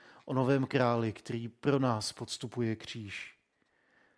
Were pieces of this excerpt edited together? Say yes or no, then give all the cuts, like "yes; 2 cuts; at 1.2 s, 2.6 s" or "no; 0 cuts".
no; 0 cuts